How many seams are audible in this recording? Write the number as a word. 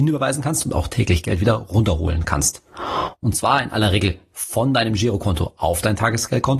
zero